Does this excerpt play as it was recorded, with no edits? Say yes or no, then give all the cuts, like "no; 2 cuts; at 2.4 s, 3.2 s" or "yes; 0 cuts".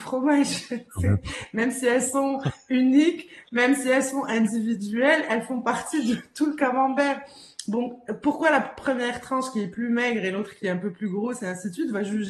yes; 0 cuts